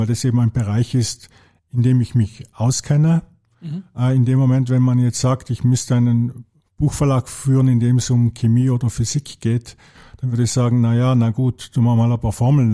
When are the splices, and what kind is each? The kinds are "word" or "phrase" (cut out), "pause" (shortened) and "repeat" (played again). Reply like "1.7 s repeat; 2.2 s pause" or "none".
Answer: none